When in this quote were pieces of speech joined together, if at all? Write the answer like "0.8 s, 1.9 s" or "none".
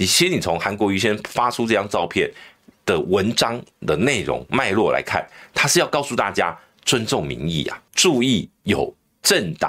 7.9 s